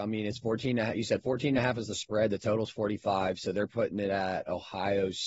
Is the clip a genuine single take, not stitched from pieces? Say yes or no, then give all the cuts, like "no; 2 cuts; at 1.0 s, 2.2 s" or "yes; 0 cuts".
yes; 0 cuts